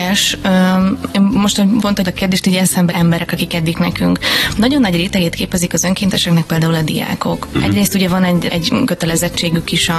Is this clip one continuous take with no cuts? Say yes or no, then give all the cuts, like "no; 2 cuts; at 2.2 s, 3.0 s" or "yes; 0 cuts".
no; 4 cuts; at 2.1 s, 2.9 s, 3.7 s, 8.5 s